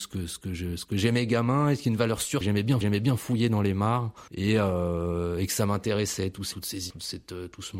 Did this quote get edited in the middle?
yes; 5 cuts; at 2.4 s, 2.8 s, 4.3 s, 6.5 s, 6.9 s

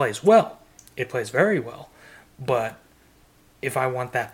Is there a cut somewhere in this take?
no; 0 cuts

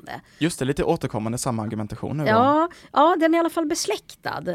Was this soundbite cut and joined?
no; 0 cuts

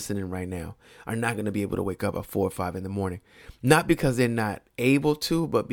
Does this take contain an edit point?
no; 0 cuts

